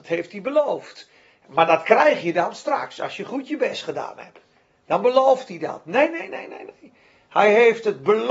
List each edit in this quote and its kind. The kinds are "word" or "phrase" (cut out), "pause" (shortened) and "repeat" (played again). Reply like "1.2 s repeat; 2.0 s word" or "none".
none